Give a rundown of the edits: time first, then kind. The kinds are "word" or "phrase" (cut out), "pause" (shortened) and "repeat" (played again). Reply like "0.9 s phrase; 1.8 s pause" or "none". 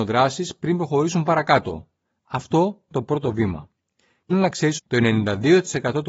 2.9 s word; 4.3 s word; 4.8 s word

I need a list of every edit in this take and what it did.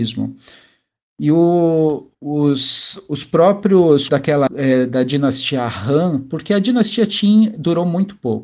2.1 s pause; 4.1 s word; 4.5 s word

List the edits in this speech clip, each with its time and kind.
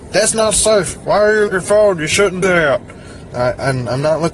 1.5 s phrase; 2.4 s word

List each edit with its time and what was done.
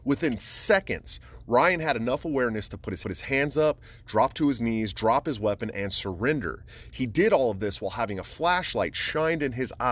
3.0 s repeat

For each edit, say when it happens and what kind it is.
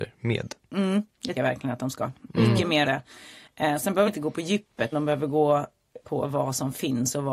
1.4 s word; 2.8 s word; 4.1 s word; 4.9 s word; 6.0 s word

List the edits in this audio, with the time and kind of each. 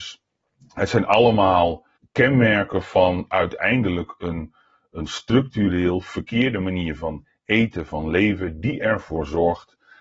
2.0 s pause

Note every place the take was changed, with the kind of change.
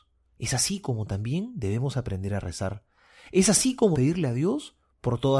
3.9 s word

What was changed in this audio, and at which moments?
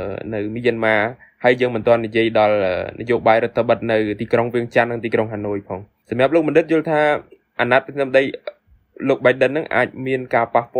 none

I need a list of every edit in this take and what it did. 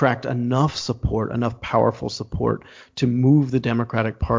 none

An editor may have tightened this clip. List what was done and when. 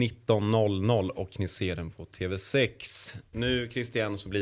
none

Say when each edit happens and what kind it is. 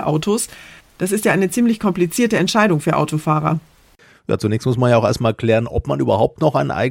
none

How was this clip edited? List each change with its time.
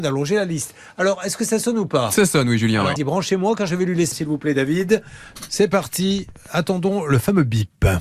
3.0 s word; 4.1 s phrase

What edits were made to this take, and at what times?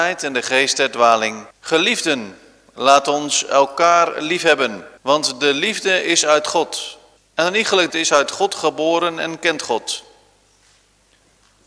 1.5 s pause; 5.0 s pause; 7.2 s pause; 7.9 s phrase

